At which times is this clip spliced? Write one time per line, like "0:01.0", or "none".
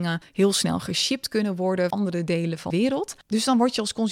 0:01.9
0:02.7